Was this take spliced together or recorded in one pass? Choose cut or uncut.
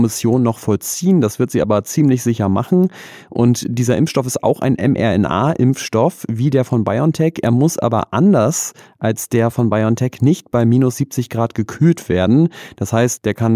uncut